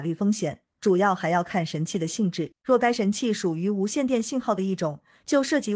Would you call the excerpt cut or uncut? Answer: cut